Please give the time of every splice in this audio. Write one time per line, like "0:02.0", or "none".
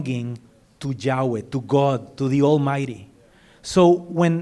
0:03.3